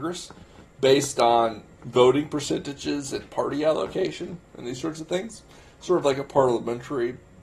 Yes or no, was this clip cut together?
no